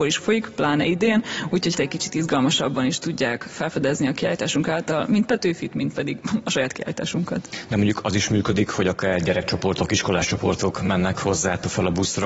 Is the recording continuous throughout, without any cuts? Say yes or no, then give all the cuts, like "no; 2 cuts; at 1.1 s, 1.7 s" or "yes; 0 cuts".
no; 1 cut; at 1.7 s